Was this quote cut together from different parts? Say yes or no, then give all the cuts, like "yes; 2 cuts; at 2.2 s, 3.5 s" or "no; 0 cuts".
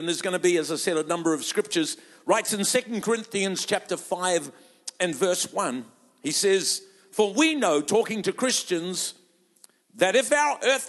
no; 0 cuts